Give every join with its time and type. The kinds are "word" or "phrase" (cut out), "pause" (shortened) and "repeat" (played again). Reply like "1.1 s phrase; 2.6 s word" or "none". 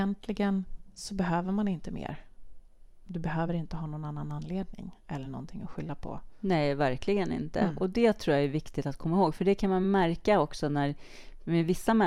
none